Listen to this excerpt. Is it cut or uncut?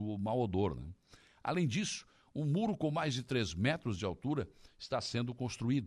uncut